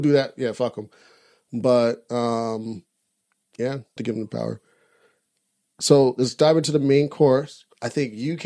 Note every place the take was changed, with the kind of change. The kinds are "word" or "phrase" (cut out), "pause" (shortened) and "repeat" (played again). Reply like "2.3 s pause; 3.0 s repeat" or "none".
4.0 s phrase